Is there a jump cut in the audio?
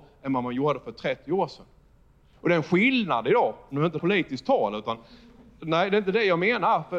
yes; 1 cut; at 4.0 s

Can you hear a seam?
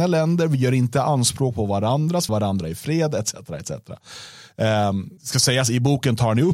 yes; 2 cuts; at 2.3 s, 5.2 s

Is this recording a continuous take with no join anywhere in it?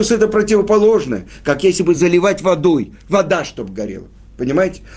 yes; 0 cuts

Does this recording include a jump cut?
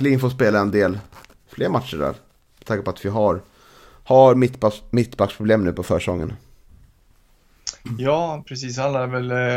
no; 0 cuts

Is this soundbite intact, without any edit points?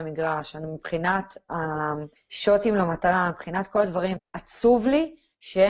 no; 2 cuts; at 2.2 s, 4.2 s

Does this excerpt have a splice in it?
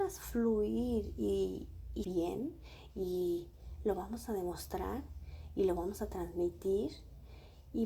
yes; 1 cut; at 2.0 s

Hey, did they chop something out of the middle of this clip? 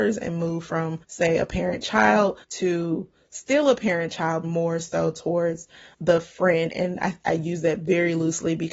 yes; 5 cuts; at 1.0 s, 2.4 s, 4.4 s, 5.9 s, 6.7 s

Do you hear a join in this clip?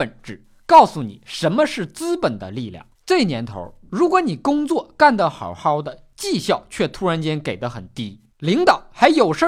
yes; 2 cuts; at 2.9 s, 8.3 s

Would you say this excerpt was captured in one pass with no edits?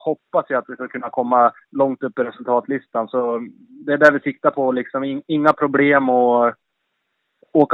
no; 1 cut; at 1.6 s

